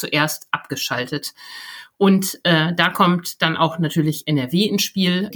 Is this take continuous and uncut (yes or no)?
yes